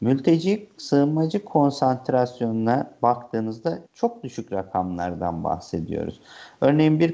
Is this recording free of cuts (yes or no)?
no